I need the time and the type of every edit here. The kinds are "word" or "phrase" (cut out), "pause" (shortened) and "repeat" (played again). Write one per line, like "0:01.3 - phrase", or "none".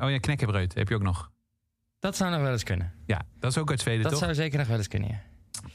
none